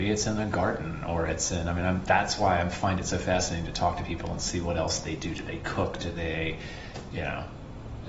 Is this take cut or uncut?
uncut